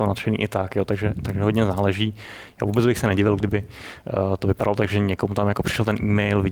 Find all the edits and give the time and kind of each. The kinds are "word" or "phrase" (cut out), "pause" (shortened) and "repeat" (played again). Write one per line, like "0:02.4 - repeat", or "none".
none